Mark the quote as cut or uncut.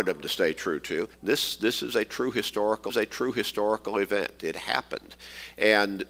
cut